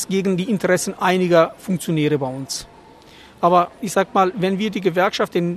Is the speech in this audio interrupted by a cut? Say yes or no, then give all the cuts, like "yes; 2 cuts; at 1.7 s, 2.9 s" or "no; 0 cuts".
no; 0 cuts